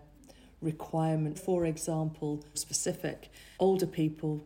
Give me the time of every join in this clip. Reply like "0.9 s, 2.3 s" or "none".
1.3 s, 2.5 s, 3.5 s

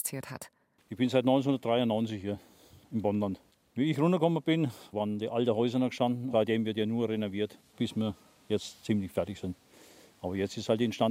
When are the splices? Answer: 6.3 s

